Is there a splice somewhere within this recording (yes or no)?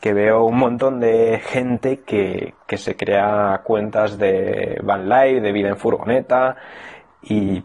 no